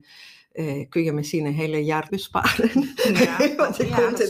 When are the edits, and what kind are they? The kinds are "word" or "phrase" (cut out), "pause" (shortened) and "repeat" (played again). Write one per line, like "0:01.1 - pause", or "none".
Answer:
0:02.1 - word